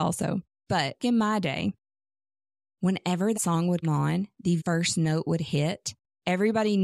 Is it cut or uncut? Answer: cut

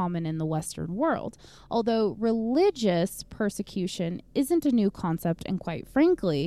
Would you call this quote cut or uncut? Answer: uncut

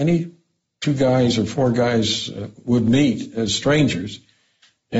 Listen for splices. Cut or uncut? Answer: uncut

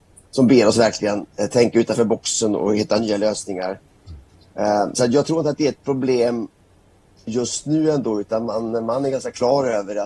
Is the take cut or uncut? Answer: uncut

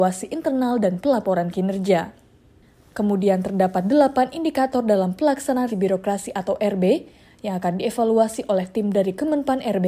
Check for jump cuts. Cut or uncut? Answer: cut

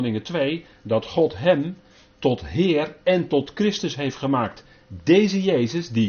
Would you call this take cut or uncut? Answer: uncut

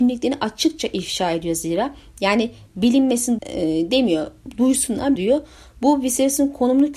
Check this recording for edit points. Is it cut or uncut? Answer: cut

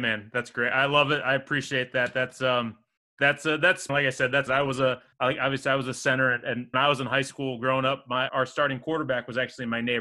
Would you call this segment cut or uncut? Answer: cut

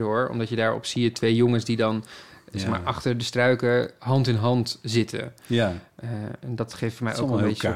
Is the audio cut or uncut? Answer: uncut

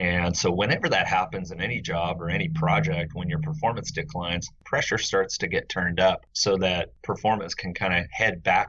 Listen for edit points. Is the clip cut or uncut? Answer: uncut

